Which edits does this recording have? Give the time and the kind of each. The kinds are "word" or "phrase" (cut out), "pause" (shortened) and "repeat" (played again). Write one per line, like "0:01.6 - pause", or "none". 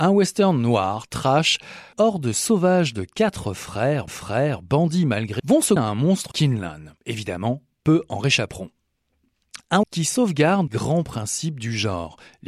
0:01.9 - phrase
0:04.1 - repeat
0:05.4 - word
0:05.8 - word
0:06.3 - word
0:07.0 - pause
0:09.8 - word
0:10.7 - word